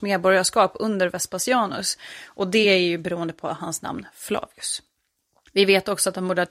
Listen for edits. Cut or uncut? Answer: uncut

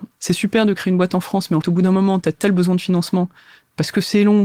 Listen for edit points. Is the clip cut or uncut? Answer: cut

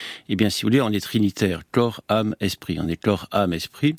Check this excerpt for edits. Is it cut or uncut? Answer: uncut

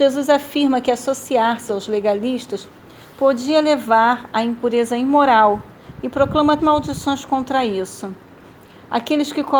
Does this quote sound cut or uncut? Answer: cut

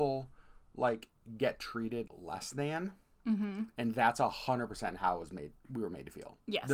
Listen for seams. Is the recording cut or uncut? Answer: cut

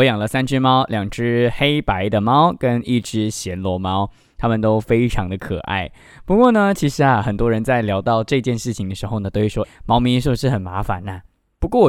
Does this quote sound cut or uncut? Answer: cut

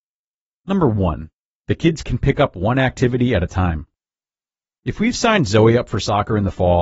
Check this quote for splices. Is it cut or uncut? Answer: uncut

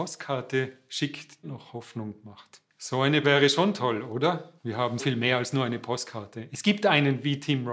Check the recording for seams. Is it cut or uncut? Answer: cut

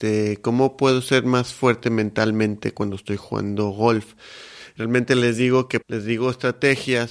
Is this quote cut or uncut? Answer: cut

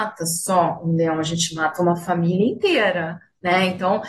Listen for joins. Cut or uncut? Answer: uncut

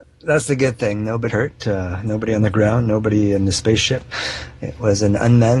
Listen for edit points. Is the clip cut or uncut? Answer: cut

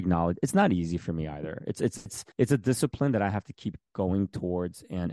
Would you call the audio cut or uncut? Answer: cut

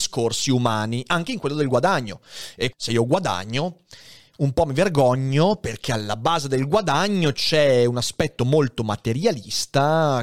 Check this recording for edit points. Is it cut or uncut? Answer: cut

